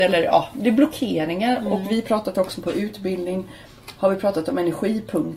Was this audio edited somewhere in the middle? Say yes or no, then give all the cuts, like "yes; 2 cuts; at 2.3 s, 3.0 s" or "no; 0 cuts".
no; 0 cuts